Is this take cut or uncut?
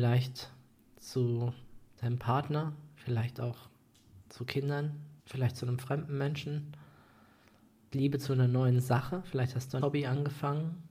cut